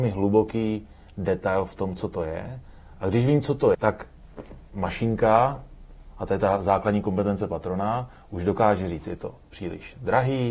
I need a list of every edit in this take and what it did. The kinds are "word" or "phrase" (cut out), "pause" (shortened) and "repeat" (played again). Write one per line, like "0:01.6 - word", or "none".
0:03.7 - word
0:04.7 - word